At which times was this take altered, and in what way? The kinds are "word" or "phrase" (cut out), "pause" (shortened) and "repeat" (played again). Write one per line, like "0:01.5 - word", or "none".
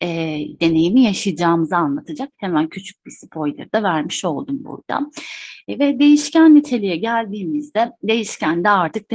none